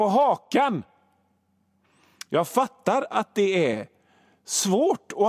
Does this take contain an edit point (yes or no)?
no